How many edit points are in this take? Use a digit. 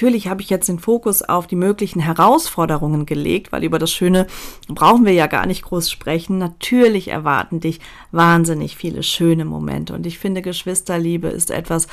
0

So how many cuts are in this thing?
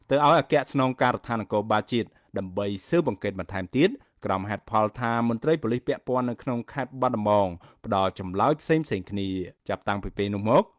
1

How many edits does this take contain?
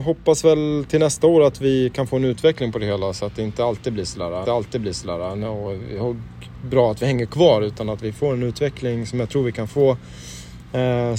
1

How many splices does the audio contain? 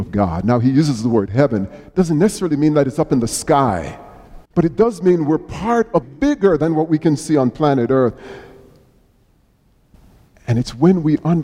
2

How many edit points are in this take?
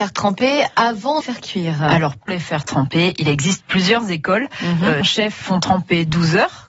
4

